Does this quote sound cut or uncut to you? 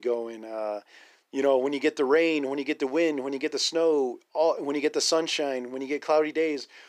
uncut